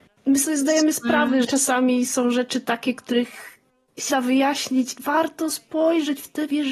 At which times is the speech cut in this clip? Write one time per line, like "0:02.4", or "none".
0:01.4
0:04.1
0:05.0